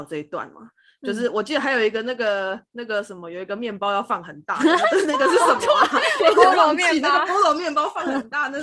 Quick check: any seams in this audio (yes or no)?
no